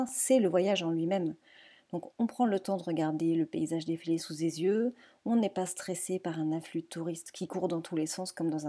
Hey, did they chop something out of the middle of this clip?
no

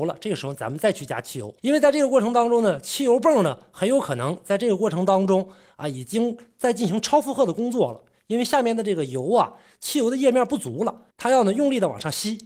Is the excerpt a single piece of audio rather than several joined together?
no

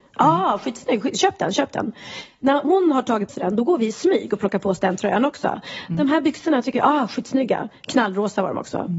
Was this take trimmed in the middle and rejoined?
yes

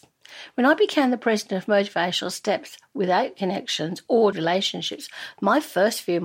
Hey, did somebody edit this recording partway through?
yes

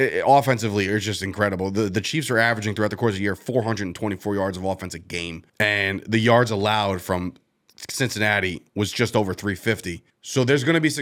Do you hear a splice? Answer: yes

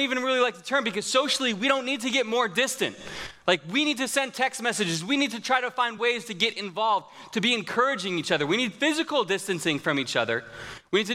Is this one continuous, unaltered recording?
yes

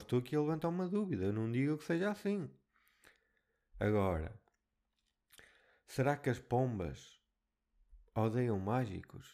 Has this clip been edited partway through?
no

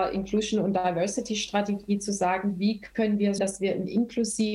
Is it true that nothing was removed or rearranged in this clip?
no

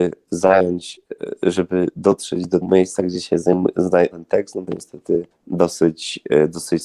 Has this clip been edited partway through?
yes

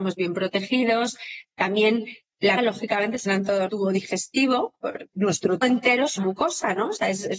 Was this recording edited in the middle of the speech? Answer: yes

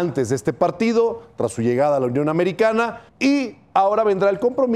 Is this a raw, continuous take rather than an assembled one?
no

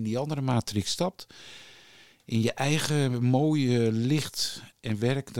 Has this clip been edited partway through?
no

